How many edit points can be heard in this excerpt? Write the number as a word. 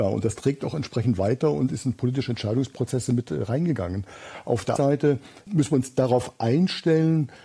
one